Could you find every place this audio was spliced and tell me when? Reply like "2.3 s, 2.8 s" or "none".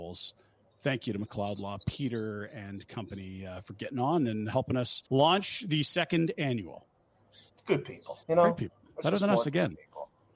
5.1 s, 7.5 s, 8.2 s